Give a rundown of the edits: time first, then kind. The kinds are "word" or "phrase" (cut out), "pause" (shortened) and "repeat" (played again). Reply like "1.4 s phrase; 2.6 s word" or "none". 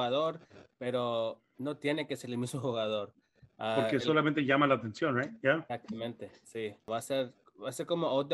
none